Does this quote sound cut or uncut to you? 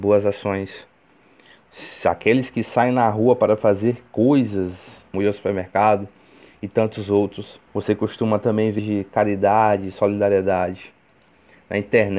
cut